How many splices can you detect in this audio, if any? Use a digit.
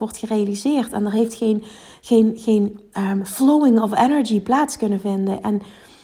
0